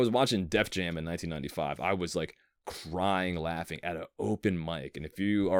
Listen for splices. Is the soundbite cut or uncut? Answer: uncut